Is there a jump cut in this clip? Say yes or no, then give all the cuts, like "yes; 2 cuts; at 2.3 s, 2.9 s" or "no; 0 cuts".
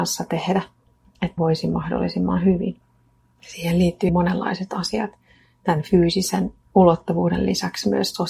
yes; 2 cuts; at 1.4 s, 4.1 s